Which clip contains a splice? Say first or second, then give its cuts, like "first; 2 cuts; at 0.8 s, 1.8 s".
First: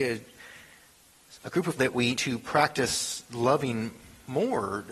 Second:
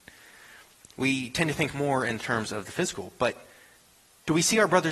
first; 2 cuts; at 1.8 s, 2.2 s